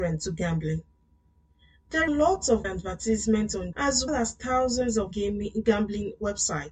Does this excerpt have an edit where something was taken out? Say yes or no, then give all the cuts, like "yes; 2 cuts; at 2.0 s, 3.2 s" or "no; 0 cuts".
yes; 5 cuts; at 2.1 s, 2.6 s, 3.7 s, 4.1 s, 5.1 s